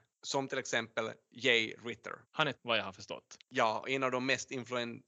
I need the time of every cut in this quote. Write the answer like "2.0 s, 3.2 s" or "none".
2.2 s, 2.5 s, 3.4 s